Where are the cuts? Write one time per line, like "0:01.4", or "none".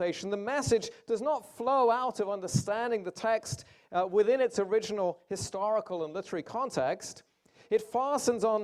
none

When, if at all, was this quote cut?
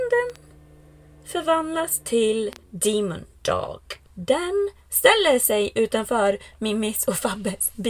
0:02.6
0:04.1

